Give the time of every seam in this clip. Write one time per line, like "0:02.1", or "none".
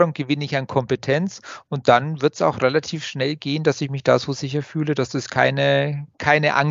none